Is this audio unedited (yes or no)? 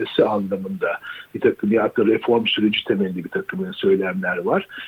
yes